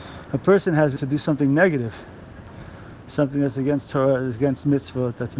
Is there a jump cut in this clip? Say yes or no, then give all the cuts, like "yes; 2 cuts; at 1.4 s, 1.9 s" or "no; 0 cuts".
yes; 1 cut; at 1.0 s